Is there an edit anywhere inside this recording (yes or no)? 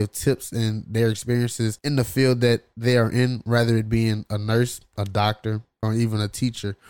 yes